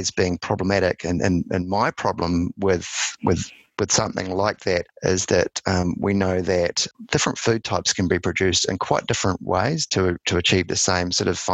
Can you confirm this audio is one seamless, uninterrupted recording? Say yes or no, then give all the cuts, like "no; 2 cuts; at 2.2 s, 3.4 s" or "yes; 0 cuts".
yes; 0 cuts